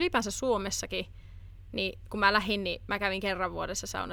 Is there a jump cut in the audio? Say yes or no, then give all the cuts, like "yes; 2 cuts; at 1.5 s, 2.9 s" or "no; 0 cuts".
no; 0 cuts